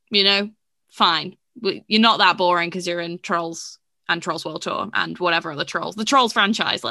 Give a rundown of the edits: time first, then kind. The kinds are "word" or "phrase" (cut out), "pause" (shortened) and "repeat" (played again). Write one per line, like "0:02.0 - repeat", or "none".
none